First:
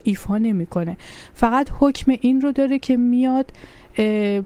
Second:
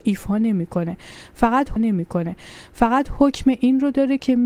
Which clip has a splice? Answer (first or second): second